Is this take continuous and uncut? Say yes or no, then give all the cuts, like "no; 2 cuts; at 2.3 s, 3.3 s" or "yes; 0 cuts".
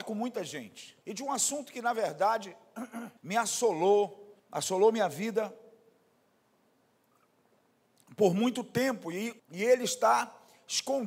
no; 4 cuts; at 1.0 s, 3.2 s, 4.4 s, 9.4 s